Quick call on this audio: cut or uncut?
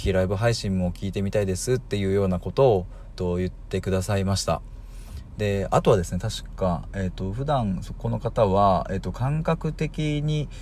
cut